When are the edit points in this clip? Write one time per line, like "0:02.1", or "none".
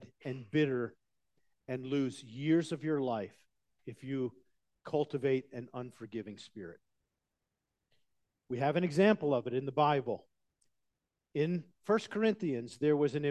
none